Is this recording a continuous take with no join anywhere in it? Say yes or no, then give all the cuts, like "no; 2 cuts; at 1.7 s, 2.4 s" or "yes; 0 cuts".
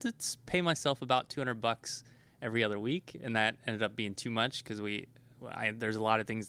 yes; 0 cuts